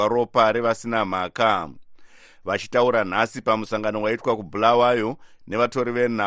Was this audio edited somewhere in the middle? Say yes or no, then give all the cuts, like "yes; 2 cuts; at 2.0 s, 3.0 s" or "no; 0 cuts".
no; 0 cuts